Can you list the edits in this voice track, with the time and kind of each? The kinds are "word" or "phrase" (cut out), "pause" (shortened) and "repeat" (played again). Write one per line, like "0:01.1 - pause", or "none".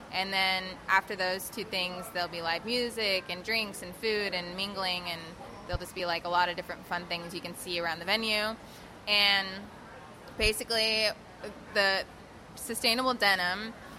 none